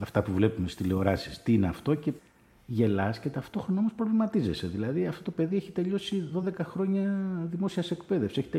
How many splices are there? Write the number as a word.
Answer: zero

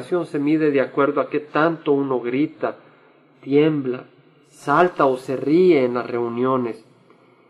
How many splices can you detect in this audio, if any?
zero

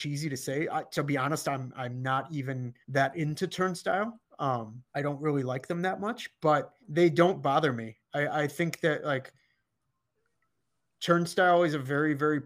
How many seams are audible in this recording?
three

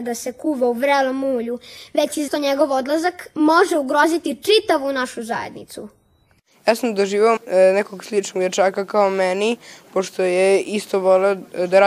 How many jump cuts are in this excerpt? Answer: two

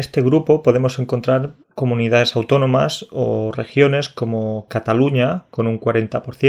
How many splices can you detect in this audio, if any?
one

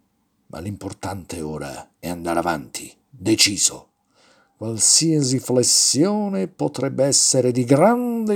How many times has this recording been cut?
two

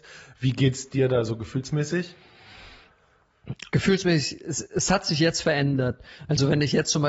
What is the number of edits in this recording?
zero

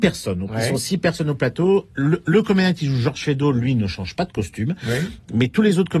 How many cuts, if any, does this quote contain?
zero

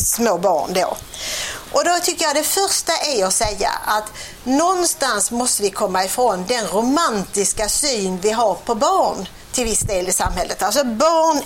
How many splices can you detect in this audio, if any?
zero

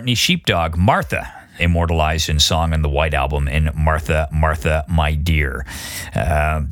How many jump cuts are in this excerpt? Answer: two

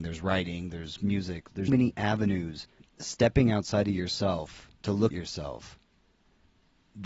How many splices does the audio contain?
four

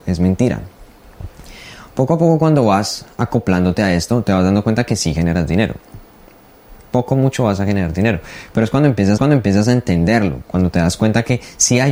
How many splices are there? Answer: one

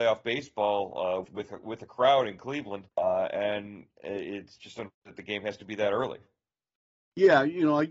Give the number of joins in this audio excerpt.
three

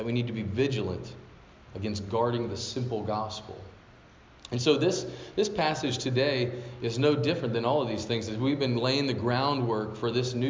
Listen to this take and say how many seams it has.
zero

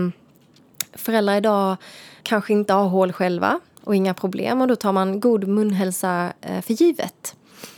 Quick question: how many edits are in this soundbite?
one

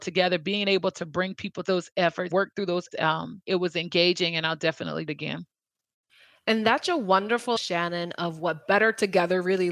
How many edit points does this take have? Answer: seven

